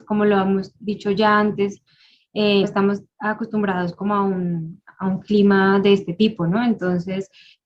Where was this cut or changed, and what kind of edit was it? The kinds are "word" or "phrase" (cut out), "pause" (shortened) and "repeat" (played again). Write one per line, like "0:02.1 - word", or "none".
0:02.6 - word